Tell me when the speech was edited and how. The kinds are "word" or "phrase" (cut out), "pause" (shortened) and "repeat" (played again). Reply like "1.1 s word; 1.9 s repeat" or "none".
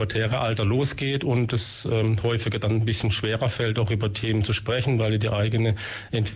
none